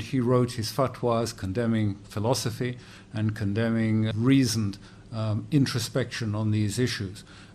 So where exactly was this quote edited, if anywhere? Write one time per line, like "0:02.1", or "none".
0:04.1